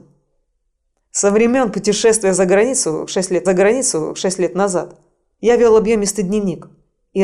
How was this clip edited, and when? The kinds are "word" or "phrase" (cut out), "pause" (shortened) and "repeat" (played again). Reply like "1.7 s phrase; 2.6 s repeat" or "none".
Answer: 3.5 s repeat